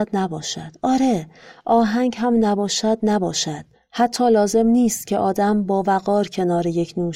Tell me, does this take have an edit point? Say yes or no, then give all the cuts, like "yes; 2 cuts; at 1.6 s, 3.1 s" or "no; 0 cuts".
yes; 1 cut; at 3.7 s